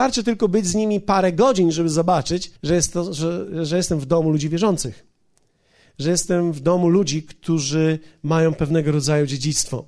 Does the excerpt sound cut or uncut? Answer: cut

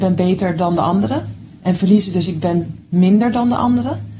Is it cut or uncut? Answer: uncut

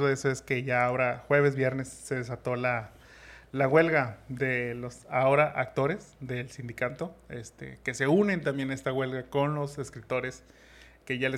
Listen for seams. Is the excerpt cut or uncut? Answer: uncut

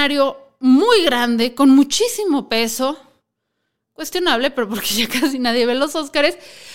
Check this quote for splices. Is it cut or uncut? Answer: uncut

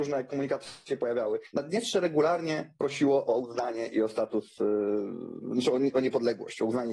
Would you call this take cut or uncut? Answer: uncut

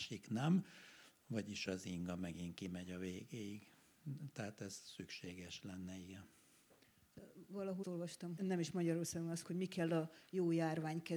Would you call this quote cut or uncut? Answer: cut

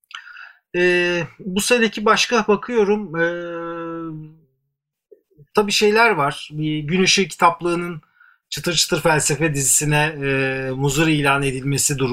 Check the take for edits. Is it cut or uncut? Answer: uncut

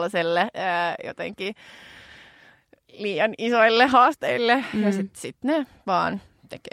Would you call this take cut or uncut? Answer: uncut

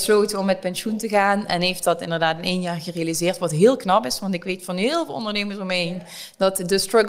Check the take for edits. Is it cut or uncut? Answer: uncut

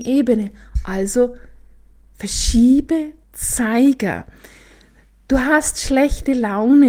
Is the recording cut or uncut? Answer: cut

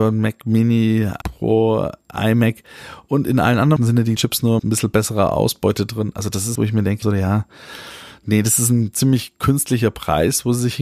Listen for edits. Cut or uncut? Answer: cut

